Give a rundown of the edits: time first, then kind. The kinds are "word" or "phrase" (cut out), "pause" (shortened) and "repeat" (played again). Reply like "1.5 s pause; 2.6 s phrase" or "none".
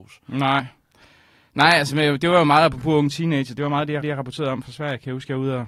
4.0 s repeat